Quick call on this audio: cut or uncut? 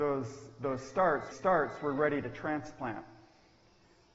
cut